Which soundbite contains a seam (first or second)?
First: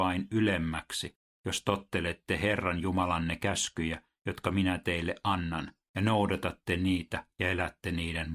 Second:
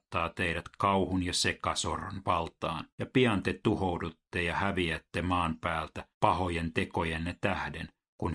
second